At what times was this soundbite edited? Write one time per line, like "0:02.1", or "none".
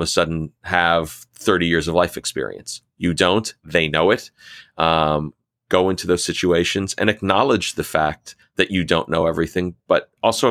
none